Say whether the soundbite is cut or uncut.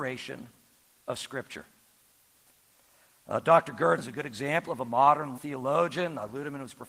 cut